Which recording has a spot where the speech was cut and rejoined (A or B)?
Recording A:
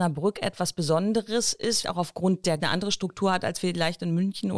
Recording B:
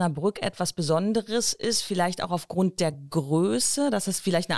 A